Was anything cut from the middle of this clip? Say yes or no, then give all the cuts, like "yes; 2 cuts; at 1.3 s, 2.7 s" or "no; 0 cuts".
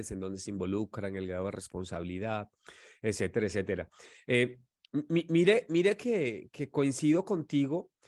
no; 0 cuts